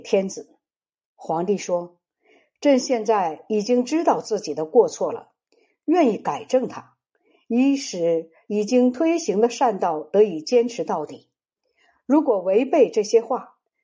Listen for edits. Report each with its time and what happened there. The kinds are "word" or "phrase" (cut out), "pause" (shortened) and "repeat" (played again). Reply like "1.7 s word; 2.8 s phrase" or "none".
none